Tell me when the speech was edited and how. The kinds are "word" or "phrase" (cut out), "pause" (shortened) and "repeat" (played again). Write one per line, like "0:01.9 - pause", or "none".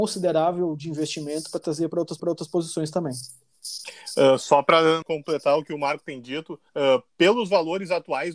0:02.2 - repeat
0:05.0 - word
0:06.7 - pause